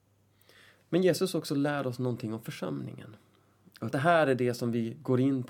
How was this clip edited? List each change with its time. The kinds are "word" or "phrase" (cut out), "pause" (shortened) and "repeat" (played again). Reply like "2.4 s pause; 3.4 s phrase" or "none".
3.9 s phrase